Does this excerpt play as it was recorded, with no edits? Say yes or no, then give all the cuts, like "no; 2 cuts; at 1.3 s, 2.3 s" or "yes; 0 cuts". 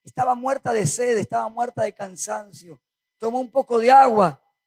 yes; 0 cuts